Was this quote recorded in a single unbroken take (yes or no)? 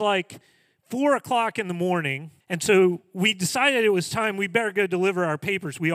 no